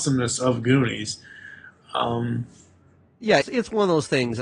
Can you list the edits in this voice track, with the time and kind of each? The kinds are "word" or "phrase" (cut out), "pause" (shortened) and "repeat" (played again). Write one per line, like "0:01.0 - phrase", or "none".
0:03.4 - word